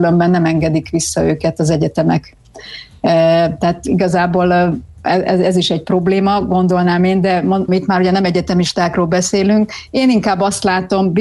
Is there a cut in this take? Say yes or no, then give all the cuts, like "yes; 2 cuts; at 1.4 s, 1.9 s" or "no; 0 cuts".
yes; 1 cut; at 7.7 s